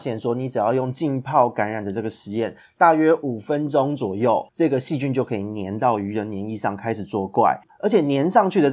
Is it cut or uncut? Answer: cut